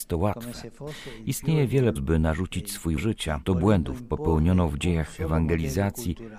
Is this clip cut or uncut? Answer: cut